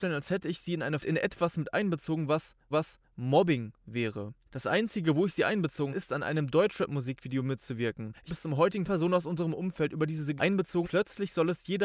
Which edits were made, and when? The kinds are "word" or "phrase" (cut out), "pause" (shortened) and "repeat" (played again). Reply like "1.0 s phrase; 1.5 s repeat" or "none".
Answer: 1.0 s phrase; 2.7 s repeat; 5.9 s word; 8.3 s word; 8.8 s phrase; 10.4 s word; 10.8 s word